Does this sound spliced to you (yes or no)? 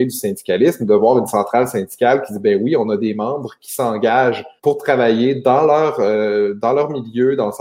yes